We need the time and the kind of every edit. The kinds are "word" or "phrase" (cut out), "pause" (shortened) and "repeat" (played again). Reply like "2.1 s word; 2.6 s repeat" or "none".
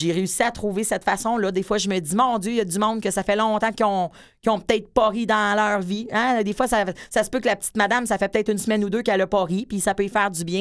none